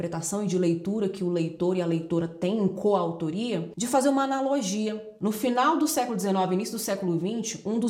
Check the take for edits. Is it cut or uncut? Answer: uncut